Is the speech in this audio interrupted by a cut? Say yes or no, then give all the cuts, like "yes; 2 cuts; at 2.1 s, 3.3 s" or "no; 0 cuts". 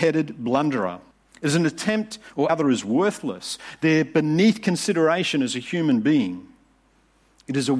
yes; 2 cuts; at 1.1 s, 2.5 s